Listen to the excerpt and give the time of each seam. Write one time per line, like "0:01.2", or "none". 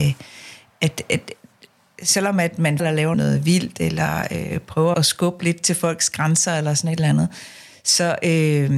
0:02.8
0:03.1
0:04.9